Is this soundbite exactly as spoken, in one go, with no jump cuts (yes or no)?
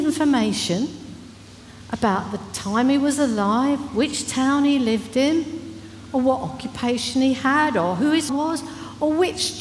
no